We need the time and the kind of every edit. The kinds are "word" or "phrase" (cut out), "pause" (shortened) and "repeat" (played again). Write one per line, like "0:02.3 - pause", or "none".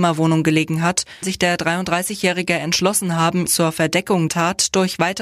0:01.2 - word
0:03.5 - word
0:04.3 - word